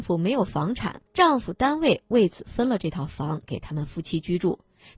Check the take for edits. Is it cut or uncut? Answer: cut